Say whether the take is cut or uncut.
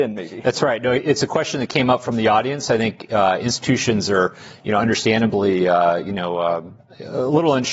uncut